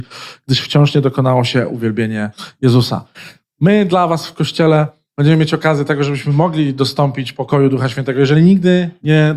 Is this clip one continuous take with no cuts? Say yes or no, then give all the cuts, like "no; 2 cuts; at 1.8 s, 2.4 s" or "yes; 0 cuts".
yes; 0 cuts